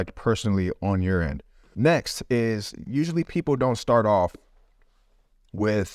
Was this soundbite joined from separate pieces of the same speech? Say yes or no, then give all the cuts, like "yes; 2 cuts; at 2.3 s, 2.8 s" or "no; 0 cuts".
no; 0 cuts